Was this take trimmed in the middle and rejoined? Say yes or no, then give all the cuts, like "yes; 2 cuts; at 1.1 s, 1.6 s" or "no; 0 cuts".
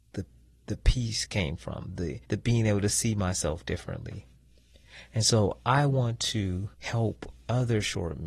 yes; 2 cuts; at 2.2 s, 6.7 s